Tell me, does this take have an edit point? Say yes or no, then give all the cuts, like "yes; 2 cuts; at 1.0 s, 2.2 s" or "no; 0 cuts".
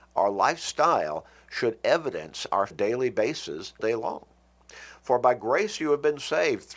yes; 2 cuts; at 2.7 s, 3.8 s